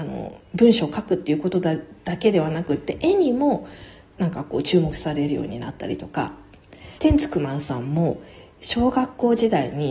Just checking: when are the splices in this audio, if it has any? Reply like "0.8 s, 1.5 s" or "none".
7.0 s